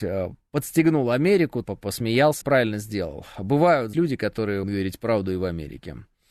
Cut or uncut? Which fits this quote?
cut